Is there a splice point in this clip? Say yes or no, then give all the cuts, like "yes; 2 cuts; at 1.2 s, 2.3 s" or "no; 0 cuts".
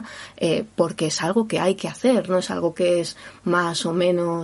no; 0 cuts